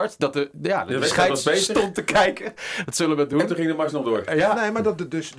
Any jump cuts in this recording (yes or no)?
no